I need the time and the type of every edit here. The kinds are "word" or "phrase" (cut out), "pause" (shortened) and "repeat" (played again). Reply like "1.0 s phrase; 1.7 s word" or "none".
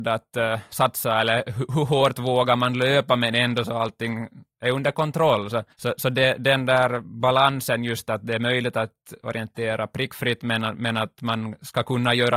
5.7 s pause